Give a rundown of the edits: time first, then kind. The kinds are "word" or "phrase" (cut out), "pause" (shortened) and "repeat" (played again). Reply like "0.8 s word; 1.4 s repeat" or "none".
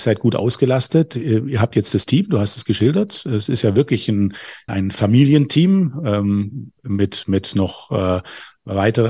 4.7 s word